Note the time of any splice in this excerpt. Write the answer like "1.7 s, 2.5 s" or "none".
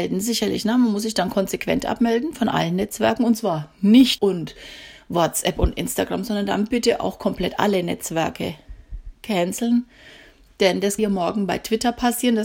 4.2 s, 9.1 s, 11.0 s